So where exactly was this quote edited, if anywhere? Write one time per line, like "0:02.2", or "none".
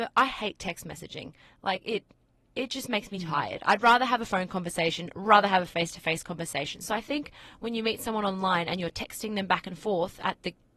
none